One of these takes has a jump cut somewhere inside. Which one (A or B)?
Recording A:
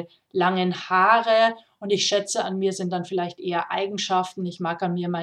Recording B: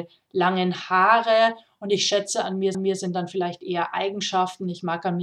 B